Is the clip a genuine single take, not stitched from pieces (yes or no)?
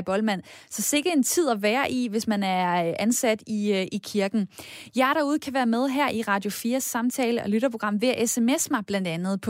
yes